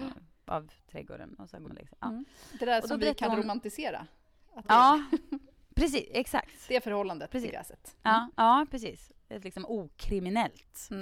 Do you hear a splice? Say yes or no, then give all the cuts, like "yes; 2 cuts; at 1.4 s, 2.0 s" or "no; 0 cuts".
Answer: yes; 3 cuts; at 1.6 s, 4.6 s, 9.4 s